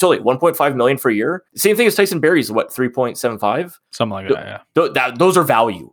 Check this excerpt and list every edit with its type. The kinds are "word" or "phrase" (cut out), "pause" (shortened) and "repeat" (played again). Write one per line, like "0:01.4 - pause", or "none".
0:01.5 - pause
0:03.9 - pause